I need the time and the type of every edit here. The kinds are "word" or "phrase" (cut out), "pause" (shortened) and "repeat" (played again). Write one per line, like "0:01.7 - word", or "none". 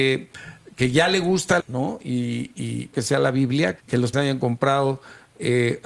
0:01.6 - word
0:02.9 - word
0:03.8 - word
0:04.1 - phrase